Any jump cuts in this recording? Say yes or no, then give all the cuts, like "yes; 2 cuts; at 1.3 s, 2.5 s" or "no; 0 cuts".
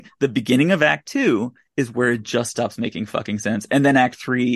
no; 0 cuts